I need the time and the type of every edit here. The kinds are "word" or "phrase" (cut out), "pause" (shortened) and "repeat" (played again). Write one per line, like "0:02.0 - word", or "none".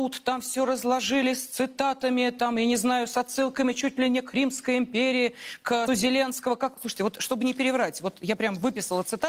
0:05.9 - word